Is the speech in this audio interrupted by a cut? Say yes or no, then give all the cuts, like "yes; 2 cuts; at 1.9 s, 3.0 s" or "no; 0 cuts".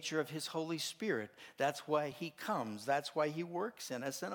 no; 0 cuts